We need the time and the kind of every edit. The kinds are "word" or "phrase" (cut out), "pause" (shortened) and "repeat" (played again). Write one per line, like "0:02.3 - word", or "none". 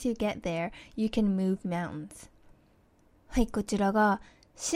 none

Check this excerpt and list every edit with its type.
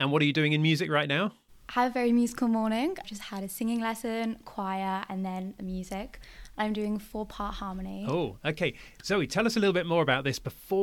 0:01.5 - pause

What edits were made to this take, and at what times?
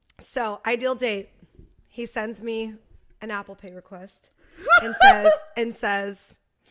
none

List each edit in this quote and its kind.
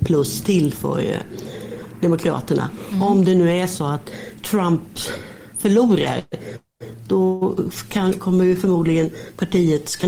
0:05.5 - pause

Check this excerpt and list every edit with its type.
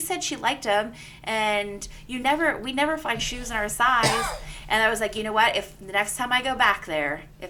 none

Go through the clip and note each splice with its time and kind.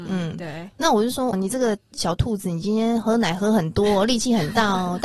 0:01.3 - word

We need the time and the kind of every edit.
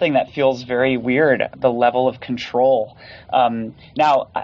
0:01.5 - word

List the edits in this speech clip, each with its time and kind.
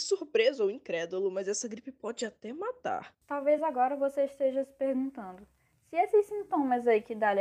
none

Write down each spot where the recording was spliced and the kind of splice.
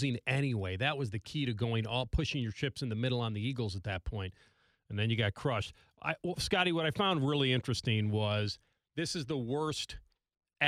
none

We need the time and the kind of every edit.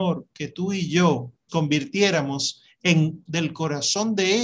0:01.5 - word
0:03.3 - word

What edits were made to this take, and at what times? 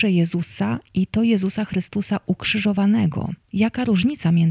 0:03.4 - pause

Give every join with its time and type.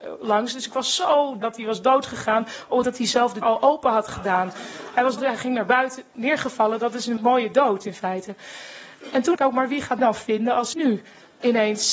0:01.4 - word
0:02.8 - word
0:03.4 - word
0:05.2 - word
0:06.1 - word
0:07.2 - word
0:09.3 - word
0:10.0 - word
0:10.7 - word

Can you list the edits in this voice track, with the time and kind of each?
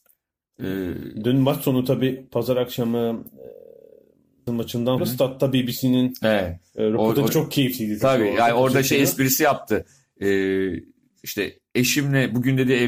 0:04.5 - word
0:05.0 - word
0:07.3 - word

